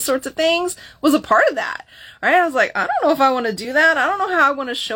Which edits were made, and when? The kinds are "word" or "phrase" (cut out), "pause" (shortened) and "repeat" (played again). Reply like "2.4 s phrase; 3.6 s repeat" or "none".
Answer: none